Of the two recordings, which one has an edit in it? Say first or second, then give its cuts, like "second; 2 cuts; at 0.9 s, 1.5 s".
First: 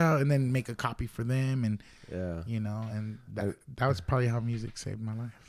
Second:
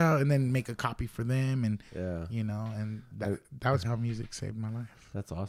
second; 2 cuts; at 1.9 s, 3.8 s